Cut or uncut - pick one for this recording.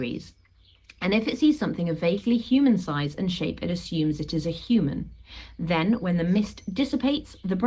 uncut